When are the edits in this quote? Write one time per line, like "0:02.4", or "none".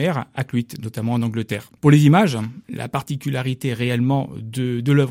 0:01.8